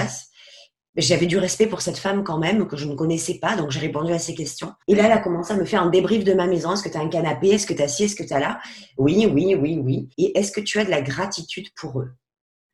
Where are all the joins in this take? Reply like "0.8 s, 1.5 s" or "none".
4.8 s, 10.1 s